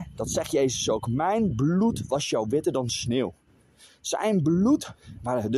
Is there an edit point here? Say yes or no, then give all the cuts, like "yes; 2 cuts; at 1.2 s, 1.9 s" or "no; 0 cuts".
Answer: no; 0 cuts